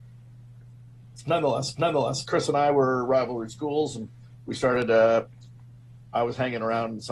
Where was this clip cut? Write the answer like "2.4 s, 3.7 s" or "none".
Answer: 1.7 s